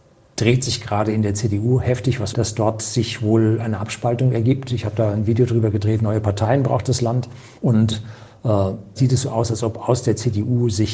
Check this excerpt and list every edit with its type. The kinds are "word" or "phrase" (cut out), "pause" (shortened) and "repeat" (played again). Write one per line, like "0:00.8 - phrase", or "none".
0:02.3 - word
0:07.6 - pause
0:09.0 - word

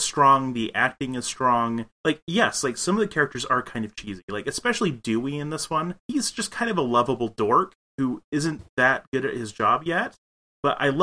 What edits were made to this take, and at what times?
0:01.9 - pause
0:06.0 - pause
0:08.7 - pause

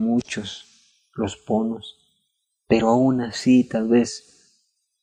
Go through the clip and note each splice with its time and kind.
none

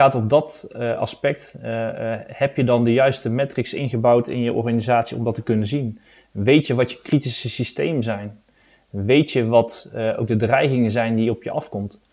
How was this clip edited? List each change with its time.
none

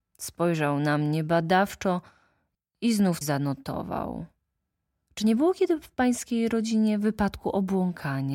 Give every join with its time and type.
0:03.2 - word

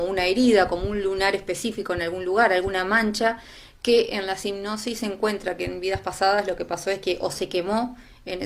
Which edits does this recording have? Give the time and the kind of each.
none

